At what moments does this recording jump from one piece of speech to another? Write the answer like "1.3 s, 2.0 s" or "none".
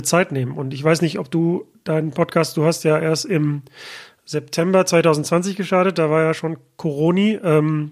none